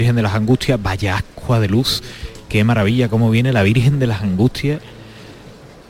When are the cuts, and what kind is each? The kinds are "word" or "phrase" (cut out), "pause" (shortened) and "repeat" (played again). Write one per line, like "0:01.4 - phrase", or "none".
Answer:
none